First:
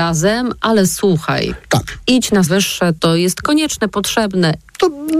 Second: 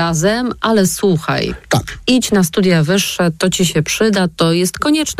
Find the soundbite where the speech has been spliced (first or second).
first